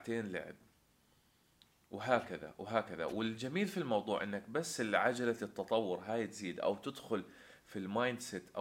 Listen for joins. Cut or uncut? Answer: uncut